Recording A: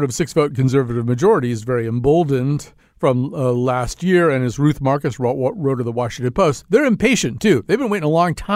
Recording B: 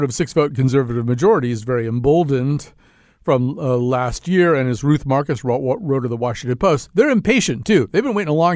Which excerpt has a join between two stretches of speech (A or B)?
A